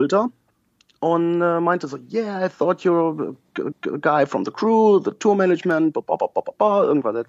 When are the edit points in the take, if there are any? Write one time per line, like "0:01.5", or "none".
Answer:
0:03.7